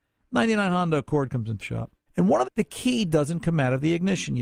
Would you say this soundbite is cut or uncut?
cut